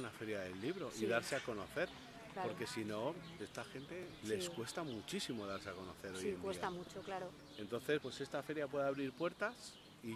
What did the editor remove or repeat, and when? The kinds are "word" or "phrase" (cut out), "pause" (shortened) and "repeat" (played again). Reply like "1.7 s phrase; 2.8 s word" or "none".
3.4 s word; 4.2 s word; 8.0 s word